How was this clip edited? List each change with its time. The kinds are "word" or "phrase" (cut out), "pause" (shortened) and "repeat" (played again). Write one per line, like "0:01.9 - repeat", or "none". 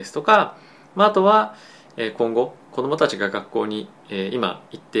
0:04.0 - pause